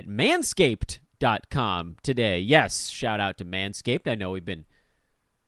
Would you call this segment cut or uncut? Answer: uncut